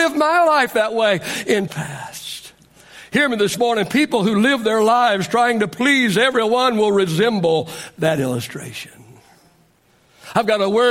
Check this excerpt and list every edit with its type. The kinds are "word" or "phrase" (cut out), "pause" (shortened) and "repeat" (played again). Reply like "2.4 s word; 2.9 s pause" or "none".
1.7 s word

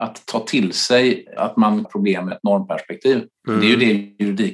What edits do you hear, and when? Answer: 1.4 s word; 1.8 s phrase; 2.3 s word

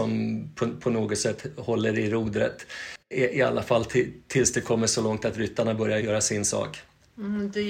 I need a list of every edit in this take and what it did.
6.0 s word

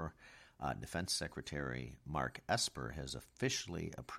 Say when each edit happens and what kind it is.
none

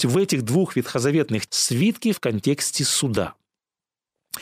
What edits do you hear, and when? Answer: 1.5 s word; 2.1 s word

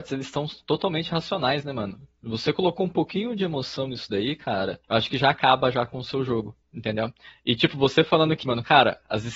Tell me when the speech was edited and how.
4.8 s pause; 6.6 s pause; 8.4 s word

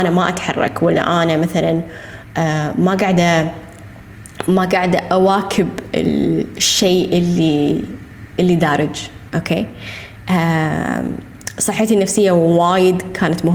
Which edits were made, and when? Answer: none

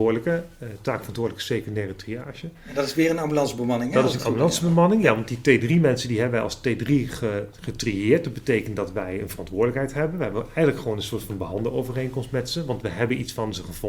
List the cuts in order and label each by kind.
none

